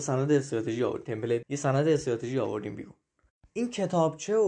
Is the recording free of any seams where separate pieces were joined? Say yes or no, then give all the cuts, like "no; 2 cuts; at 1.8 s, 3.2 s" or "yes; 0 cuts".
no; 1 cut; at 1.4 s